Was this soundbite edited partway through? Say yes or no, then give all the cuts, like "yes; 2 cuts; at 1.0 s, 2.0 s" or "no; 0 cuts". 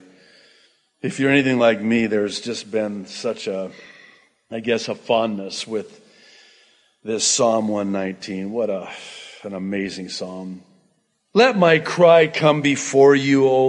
no; 0 cuts